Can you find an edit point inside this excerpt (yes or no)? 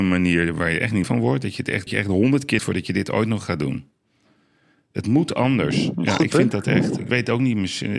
yes